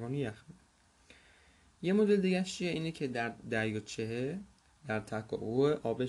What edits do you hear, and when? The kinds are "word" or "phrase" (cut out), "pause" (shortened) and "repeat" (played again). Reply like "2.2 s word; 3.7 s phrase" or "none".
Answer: 3.4 s word